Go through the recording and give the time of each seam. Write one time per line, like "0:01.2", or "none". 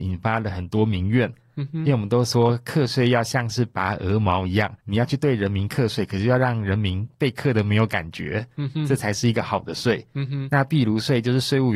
0:04.8